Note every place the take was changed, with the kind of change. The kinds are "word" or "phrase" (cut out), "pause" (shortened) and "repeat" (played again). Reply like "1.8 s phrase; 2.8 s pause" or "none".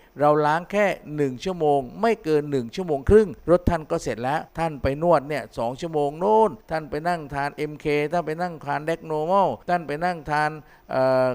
3.4 s pause; 4.5 s pause; 6.6 s pause; 9.6 s pause